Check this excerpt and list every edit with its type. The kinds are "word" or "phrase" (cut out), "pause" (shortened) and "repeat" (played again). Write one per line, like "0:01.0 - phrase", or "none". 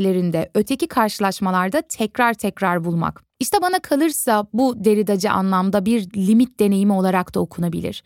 0:03.3 - pause